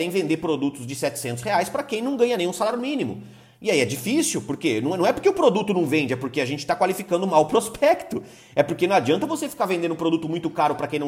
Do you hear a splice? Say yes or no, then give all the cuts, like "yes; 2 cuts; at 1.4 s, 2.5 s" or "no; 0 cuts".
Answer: no; 0 cuts